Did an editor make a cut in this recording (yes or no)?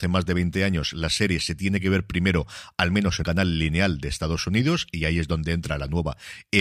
yes